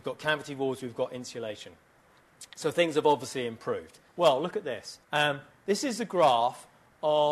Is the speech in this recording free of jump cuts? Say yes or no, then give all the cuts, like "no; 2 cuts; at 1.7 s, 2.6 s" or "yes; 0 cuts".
no; 2 cuts; at 4.1 s, 5.0 s